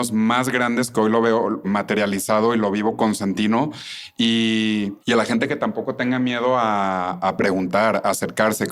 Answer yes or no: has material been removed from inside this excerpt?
yes